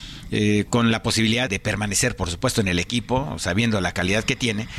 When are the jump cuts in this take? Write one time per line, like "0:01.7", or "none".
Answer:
0:01.5